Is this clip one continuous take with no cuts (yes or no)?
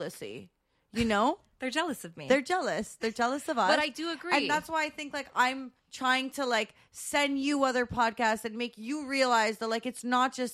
no